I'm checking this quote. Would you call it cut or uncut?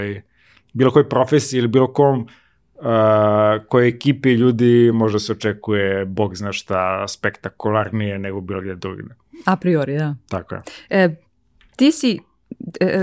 uncut